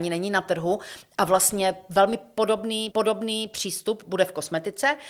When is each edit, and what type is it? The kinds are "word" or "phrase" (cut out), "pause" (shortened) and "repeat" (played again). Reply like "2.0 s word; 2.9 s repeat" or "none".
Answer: 2.9 s repeat